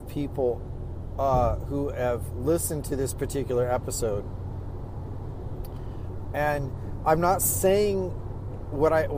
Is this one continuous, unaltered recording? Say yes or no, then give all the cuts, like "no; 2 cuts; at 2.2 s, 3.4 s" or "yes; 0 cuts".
yes; 0 cuts